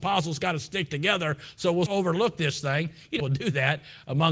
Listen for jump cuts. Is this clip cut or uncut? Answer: cut